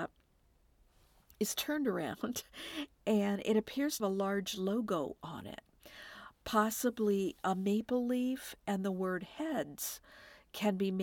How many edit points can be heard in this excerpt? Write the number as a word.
one